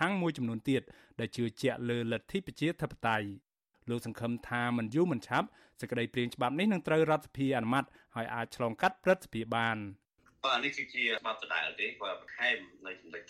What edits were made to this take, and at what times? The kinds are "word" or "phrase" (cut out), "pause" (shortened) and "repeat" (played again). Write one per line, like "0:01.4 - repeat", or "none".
none